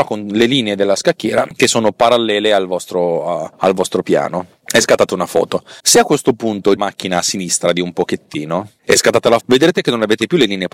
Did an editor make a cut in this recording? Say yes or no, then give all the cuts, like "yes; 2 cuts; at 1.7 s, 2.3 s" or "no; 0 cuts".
yes; 4 cuts; at 3.5 s, 5.8 s, 6.8 s, 9.4 s